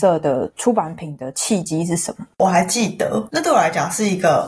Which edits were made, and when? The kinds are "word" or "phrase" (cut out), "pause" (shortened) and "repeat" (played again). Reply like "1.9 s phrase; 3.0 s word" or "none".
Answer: 2.3 s pause